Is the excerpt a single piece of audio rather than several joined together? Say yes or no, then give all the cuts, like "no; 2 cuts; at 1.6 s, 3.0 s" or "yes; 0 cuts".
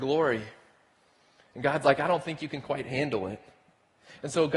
yes; 0 cuts